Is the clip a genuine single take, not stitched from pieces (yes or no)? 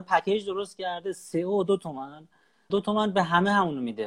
no